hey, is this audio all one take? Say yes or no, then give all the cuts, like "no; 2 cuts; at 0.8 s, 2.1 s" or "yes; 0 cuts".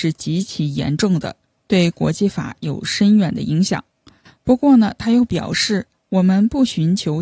yes; 0 cuts